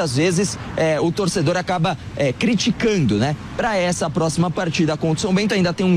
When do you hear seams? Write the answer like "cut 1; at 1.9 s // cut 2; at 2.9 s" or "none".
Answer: none